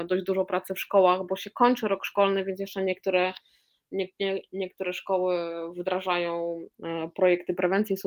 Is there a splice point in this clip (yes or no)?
no